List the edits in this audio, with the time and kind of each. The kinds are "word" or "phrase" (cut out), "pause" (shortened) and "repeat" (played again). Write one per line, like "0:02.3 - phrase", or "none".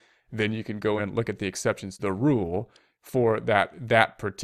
0:01.0 - word
0:02.0 - word

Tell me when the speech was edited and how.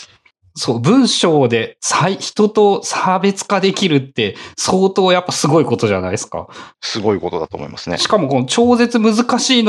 0:06.7 - pause

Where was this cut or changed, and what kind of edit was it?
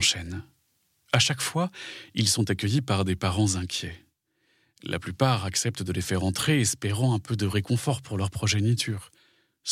none

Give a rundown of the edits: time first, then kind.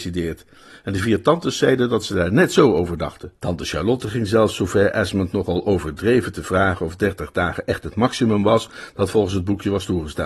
0:03.3 - pause

